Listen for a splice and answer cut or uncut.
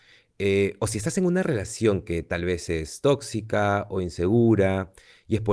uncut